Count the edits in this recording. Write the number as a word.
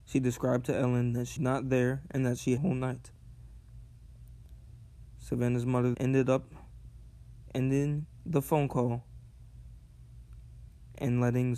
three